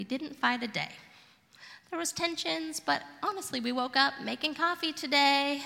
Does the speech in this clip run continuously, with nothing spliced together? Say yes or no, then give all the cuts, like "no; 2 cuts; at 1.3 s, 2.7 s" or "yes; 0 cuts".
yes; 0 cuts